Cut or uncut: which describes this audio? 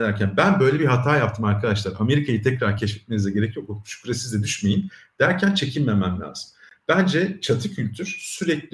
uncut